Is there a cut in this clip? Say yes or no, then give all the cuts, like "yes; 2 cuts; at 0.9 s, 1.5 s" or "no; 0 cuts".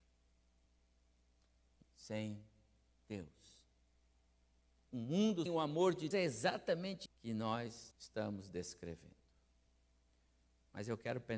yes; 5 cuts; at 1.8 s, 5.5 s, 6.1 s, 7.1 s, 7.9 s